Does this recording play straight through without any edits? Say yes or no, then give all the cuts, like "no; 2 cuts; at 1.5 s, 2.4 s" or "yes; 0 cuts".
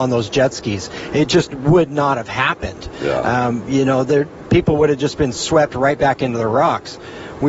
yes; 0 cuts